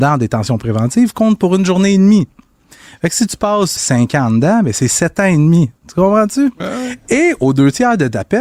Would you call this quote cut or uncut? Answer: cut